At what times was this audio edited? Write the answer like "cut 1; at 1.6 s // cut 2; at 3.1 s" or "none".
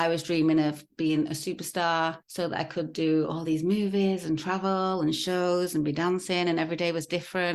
cut 1; at 2.2 s